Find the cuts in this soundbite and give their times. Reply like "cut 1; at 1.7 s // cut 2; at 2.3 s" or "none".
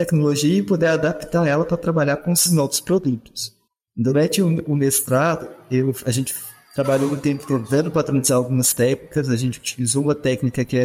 cut 1; at 3.7 s